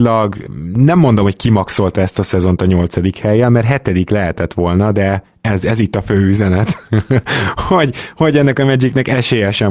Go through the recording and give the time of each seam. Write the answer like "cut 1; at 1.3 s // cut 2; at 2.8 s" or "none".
none